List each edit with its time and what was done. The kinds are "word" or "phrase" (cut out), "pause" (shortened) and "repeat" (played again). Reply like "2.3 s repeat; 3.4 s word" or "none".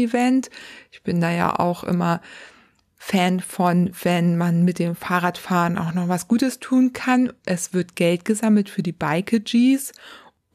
none